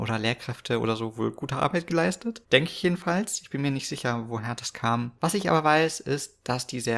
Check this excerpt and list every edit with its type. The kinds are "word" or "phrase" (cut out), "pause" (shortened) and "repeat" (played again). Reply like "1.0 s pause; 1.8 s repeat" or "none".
none